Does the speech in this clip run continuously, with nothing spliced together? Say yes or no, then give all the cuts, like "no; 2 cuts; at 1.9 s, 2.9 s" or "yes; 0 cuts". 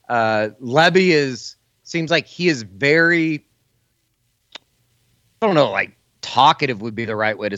yes; 0 cuts